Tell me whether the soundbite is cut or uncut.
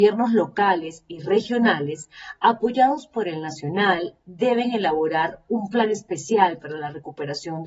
uncut